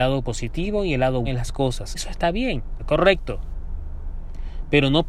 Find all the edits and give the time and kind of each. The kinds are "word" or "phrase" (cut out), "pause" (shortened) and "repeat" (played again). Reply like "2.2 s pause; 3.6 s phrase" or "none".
1.2 s word; 1.9 s word; 2.8 s word